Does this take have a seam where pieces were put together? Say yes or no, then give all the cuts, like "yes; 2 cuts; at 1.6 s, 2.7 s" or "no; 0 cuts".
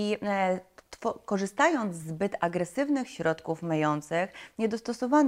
no; 0 cuts